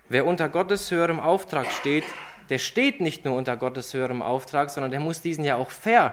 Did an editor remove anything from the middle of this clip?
no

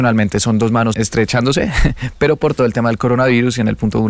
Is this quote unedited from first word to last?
yes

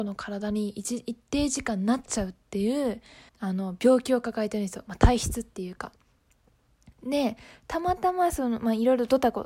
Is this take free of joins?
no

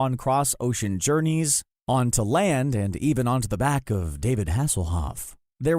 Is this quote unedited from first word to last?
yes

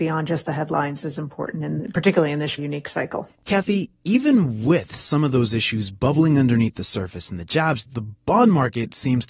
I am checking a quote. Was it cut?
yes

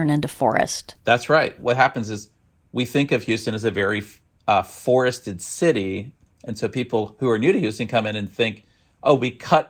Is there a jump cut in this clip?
yes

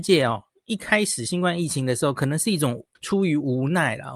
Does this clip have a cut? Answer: yes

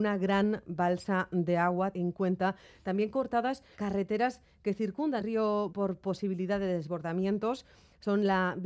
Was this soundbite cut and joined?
yes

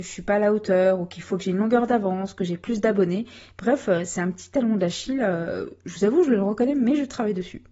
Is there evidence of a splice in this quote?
no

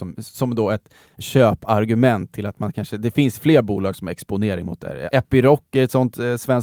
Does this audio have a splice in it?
no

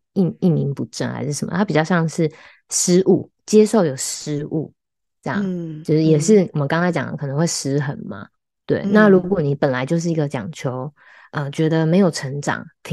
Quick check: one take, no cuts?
yes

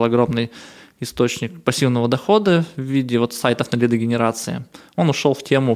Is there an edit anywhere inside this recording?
no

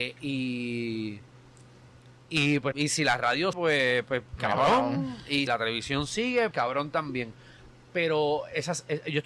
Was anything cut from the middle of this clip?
yes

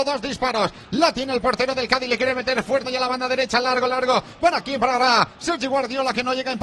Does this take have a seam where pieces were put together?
yes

